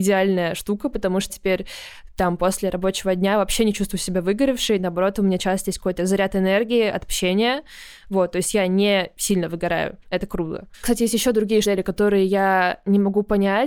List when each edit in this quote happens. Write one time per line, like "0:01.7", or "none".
0:01.3
0:10.0
0:10.7
0:11.6